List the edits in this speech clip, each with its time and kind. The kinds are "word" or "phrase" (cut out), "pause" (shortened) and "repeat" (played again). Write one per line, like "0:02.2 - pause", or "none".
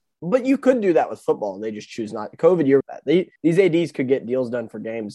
0:02.8 - phrase
0:03.4 - pause